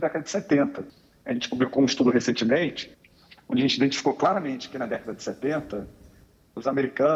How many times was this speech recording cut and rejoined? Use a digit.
0